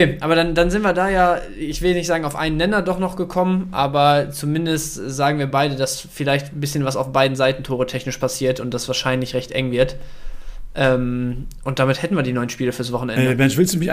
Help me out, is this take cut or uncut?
uncut